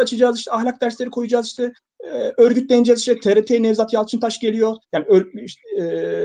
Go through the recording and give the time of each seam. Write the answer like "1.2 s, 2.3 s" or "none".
1.8 s, 4.8 s